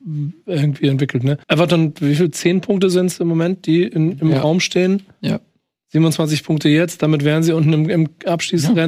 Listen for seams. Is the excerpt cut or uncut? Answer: cut